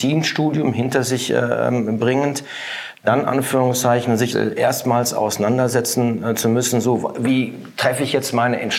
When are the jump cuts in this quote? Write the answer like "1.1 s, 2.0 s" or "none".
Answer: 4.3 s